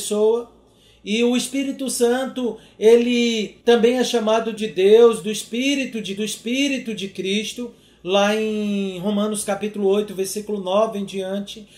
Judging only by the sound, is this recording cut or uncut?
cut